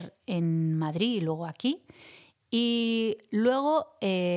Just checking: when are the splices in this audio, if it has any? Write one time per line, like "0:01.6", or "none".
none